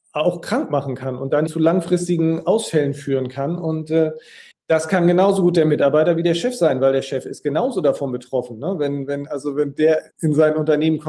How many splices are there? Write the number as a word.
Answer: three